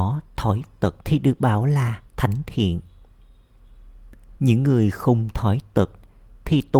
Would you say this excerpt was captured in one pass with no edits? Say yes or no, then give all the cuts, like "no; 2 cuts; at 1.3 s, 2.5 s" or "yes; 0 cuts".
no; 3 cuts; at 1.0 s, 2.1 s, 4.4 s